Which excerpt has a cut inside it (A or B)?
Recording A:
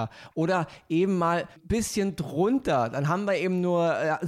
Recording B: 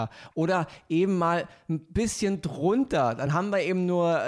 A